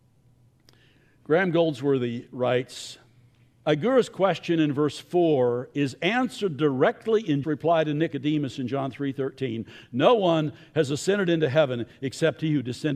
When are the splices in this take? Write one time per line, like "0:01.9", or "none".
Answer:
0:03.3
0:07.4